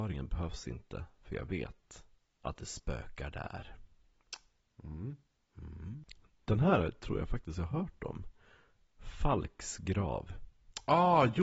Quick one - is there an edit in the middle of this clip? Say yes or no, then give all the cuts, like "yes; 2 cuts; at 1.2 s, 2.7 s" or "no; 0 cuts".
no; 0 cuts